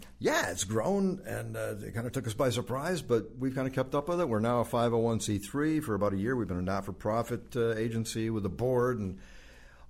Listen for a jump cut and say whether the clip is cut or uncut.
uncut